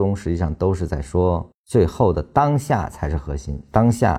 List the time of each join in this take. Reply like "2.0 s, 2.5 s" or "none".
1.5 s

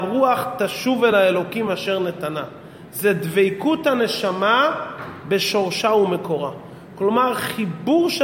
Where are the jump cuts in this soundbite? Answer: none

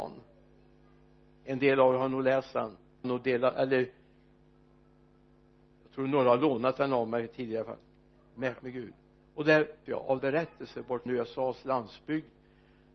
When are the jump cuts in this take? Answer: 3.0 s, 8.6 s, 9.9 s, 10.2 s, 11.1 s

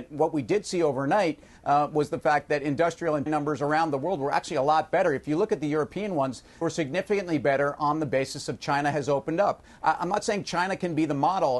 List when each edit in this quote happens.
3.3 s, 6.6 s

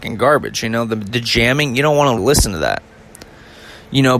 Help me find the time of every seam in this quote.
2.2 s

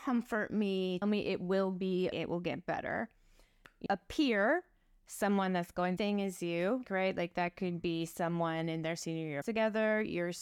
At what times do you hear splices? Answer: 1.0 s, 2.1 s, 3.9 s, 6.0 s, 6.8 s, 9.4 s

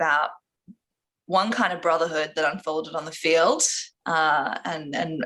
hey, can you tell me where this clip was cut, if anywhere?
3.9 s

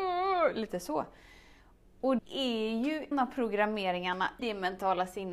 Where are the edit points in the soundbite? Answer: 2.2 s, 3.1 s, 4.4 s

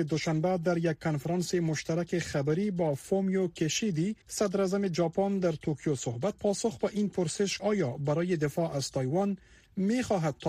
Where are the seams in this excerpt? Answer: 4.2 s, 6.3 s, 7.6 s

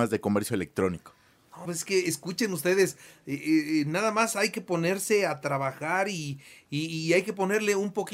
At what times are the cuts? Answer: 1.7 s

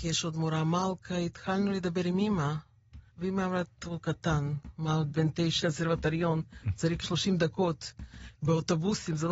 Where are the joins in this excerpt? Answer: 3.1 s, 5.1 s, 5.6 s, 7.0 s

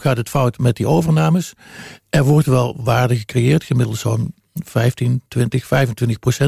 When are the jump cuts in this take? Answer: none

